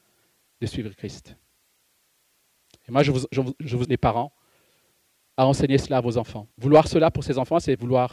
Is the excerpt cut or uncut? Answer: cut